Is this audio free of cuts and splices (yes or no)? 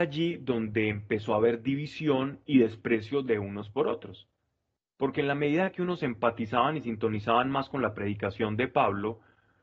yes